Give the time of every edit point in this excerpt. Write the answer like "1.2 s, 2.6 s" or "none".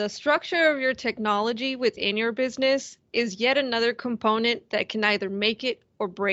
none